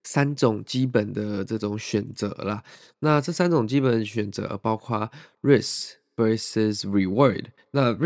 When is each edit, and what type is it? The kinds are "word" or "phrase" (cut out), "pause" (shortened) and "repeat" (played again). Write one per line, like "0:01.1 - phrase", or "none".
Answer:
none